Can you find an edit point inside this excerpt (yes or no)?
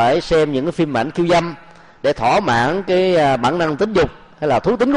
no